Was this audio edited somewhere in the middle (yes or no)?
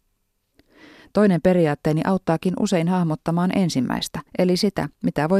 yes